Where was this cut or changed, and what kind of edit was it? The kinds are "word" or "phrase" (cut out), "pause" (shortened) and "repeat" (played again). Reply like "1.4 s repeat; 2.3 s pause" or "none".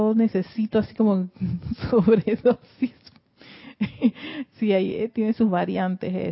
5.1 s word